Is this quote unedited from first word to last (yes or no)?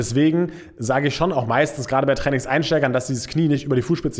yes